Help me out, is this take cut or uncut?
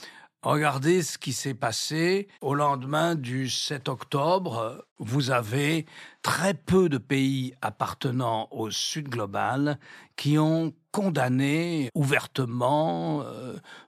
cut